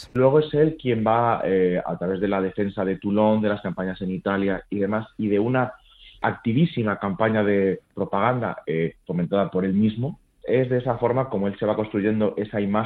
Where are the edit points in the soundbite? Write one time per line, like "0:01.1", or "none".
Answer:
none